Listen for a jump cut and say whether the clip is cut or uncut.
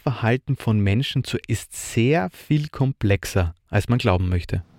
cut